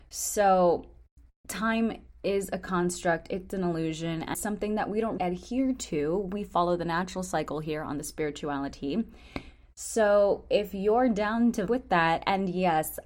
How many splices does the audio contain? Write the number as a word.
three